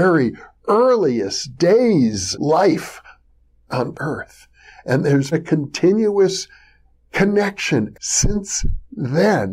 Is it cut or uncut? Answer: cut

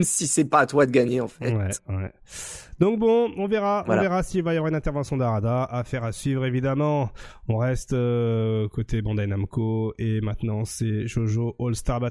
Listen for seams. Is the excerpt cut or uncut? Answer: uncut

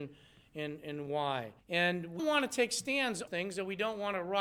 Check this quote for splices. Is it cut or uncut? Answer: cut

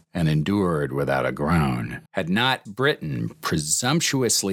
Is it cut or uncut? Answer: cut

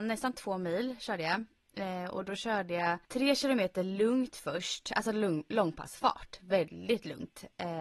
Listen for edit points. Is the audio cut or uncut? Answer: cut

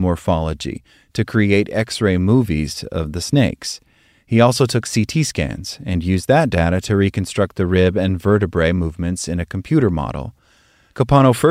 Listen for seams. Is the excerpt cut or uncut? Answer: uncut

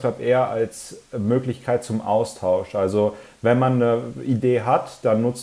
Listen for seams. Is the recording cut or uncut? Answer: uncut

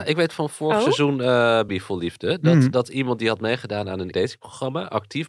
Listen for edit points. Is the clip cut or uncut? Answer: cut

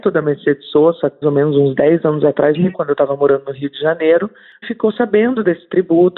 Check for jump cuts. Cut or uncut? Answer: cut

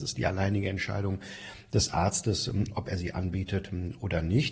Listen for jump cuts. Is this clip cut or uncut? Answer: uncut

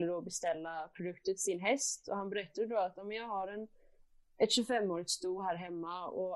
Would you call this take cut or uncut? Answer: uncut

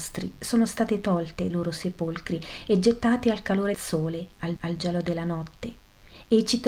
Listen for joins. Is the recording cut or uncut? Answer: cut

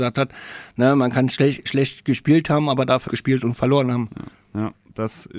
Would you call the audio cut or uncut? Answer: cut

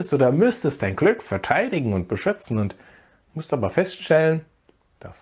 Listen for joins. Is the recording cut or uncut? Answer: uncut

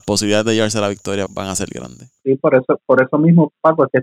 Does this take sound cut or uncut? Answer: cut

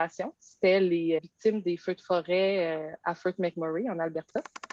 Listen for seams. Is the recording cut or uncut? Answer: cut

